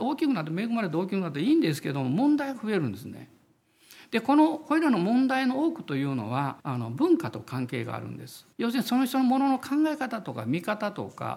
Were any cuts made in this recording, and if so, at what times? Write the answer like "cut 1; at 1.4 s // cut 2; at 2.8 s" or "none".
cut 1; at 6.6 s // cut 2; at 8.5 s